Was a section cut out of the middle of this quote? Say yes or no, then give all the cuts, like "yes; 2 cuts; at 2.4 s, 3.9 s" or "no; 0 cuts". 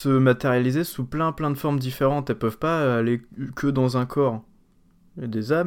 no; 0 cuts